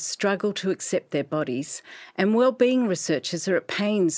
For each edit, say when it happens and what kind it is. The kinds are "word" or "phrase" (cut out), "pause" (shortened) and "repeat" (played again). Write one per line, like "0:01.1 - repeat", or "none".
none

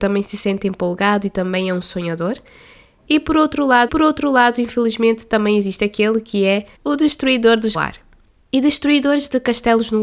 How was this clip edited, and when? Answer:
0:03.9 - repeat
0:06.7 - pause
0:07.7 - phrase

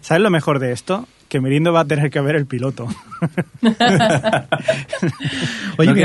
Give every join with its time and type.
none

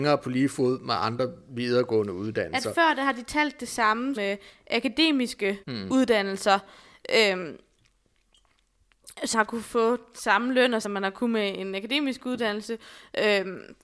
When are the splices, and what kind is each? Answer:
0:04.2 - word
0:05.6 - pause
0:09.3 - word
0:10.8 - phrase

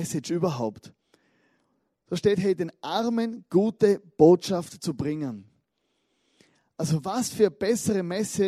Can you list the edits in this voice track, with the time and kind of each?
none

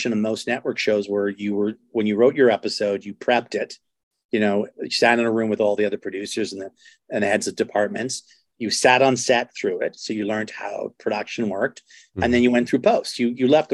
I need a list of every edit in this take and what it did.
none

